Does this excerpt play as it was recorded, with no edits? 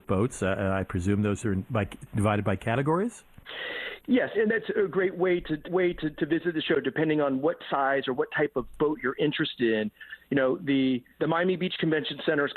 no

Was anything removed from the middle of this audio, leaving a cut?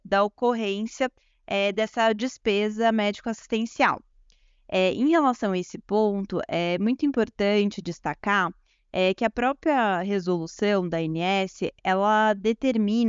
no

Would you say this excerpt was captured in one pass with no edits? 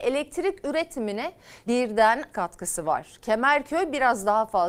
no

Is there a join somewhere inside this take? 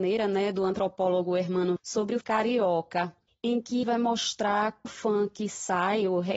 yes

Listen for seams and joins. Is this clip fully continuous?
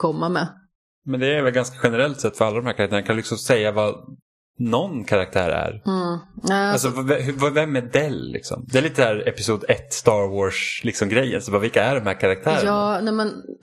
yes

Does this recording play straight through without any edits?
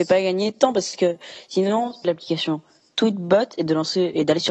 no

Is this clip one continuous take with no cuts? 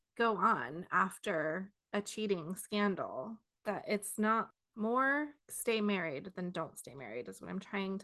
no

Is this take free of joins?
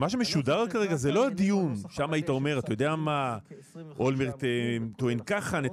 yes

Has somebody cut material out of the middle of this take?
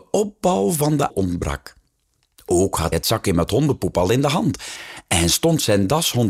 yes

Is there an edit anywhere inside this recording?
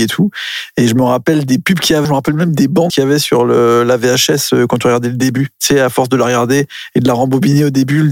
yes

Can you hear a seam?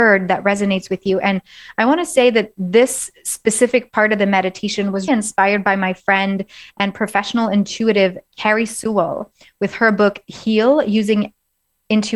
yes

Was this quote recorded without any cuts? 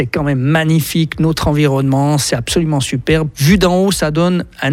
yes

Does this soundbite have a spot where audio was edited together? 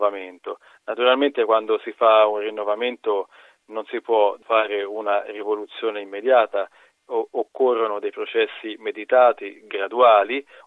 no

